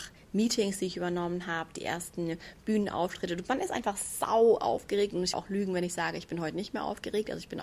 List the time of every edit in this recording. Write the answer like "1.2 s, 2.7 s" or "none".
5.3 s